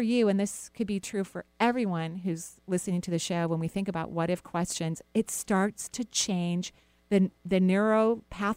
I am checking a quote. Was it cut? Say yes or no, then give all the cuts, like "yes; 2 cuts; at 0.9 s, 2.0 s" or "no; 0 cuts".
no; 0 cuts